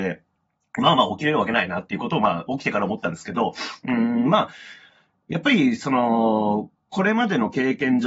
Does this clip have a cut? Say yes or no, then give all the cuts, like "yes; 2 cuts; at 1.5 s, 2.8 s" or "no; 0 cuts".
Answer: no; 0 cuts